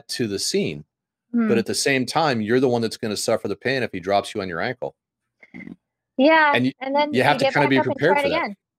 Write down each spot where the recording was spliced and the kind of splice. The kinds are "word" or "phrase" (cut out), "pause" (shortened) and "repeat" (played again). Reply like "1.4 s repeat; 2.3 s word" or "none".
none